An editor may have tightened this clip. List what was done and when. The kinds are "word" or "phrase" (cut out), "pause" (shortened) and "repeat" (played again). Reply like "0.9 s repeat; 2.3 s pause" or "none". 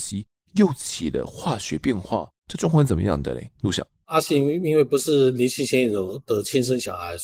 2.4 s pause